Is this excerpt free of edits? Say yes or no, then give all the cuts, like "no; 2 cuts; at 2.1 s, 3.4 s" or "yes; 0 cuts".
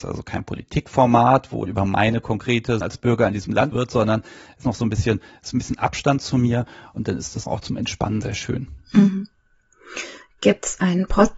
no; 6 cuts; at 1.7 s, 2.8 s, 3.7 s, 4.6 s, 7.4 s, 8.2 s